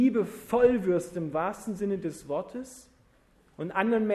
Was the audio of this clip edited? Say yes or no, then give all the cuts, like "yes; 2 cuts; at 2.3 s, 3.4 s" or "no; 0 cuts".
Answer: no; 0 cuts